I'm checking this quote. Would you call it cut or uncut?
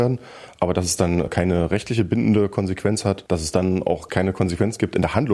uncut